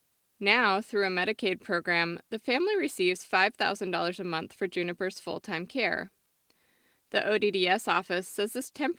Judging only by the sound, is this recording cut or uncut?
uncut